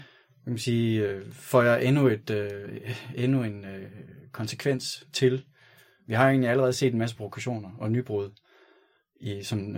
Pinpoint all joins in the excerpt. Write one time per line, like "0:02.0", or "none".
none